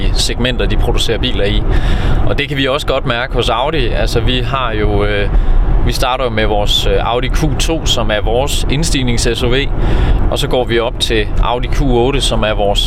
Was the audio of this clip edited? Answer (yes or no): no